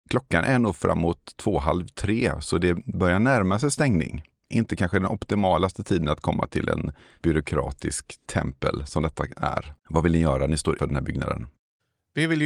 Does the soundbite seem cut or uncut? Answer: cut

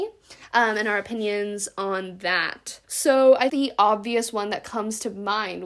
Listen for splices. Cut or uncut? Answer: cut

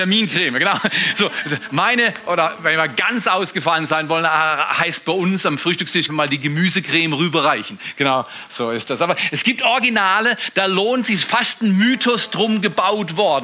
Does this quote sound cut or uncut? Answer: cut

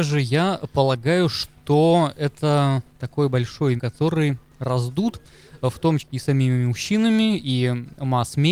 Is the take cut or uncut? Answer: cut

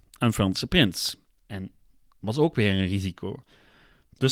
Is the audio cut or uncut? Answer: uncut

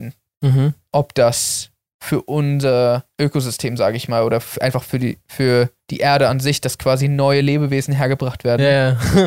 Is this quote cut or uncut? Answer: uncut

